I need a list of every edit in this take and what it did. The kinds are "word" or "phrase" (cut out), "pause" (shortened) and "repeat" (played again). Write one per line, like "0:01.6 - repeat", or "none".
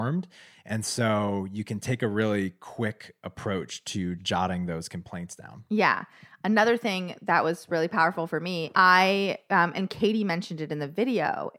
0:04.2 - word
0:08.7 - word